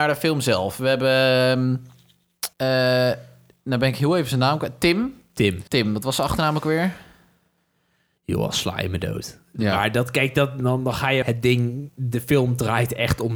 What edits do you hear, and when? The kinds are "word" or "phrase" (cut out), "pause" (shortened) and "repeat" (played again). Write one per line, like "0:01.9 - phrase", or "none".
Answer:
0:02.5 - pause
0:05.7 - pause
0:11.2 - phrase